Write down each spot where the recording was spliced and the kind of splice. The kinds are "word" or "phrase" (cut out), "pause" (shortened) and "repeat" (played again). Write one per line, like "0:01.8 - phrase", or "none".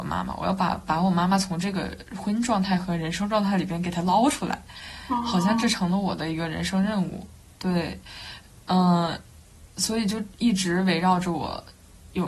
none